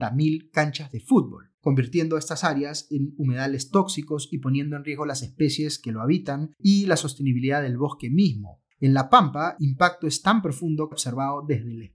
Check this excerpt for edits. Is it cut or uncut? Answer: cut